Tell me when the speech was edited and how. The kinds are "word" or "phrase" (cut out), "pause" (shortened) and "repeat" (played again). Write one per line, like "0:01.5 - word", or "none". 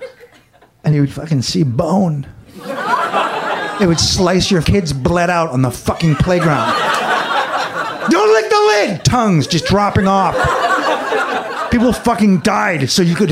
0:00.9 - word
0:04.6 - word